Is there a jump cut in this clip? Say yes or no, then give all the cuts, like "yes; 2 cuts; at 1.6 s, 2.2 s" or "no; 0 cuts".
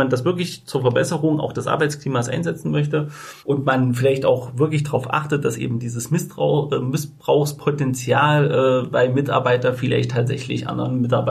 yes; 1 cut; at 3.4 s